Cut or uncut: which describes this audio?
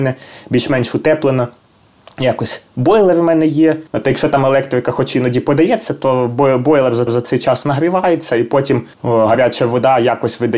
cut